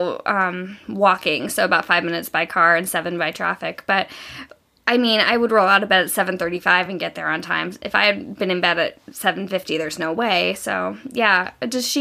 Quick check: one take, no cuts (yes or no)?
yes